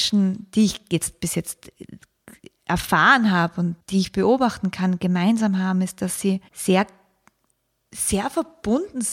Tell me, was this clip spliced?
yes; 1 cut; at 6.5 s

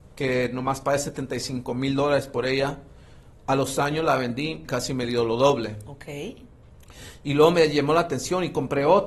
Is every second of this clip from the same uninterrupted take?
no; 1 cut; at 4.6 s

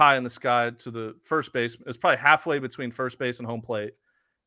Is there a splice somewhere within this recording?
no; 0 cuts

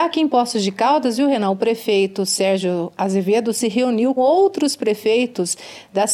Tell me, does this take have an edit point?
yes; 1 cut; at 4.2 s

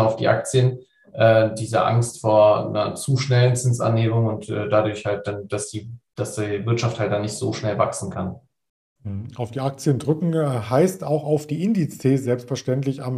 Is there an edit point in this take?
no; 0 cuts

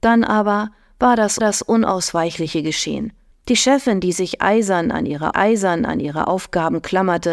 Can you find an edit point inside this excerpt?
yes; 3 cuts; at 1.4 s, 3.3 s, 5.3 s

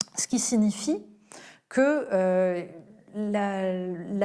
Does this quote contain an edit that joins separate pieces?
no; 0 cuts

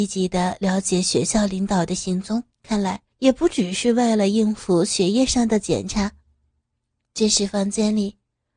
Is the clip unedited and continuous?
no; 3 cuts; at 2.5 s, 3.1 s, 6.6 s

